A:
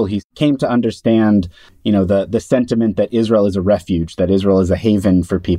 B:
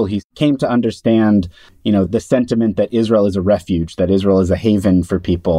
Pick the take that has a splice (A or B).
B